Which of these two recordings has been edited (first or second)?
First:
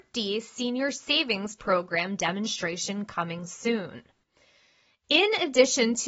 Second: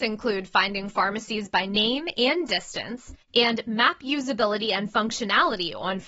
second